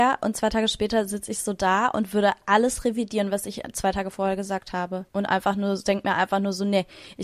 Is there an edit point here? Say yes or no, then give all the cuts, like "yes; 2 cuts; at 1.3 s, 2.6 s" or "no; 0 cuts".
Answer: yes; 1 cut; at 5.1 s